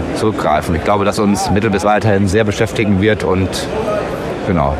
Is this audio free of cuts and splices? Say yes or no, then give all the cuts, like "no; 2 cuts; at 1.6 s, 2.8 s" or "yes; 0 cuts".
no; 2 cuts; at 1.1 s, 1.8 s